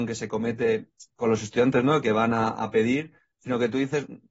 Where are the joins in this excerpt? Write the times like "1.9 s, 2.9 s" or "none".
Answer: 1.1 s